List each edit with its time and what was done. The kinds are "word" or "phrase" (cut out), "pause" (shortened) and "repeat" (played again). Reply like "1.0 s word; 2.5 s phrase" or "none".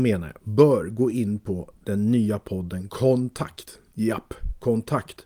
none